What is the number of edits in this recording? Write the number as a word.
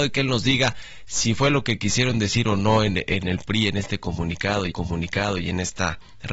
one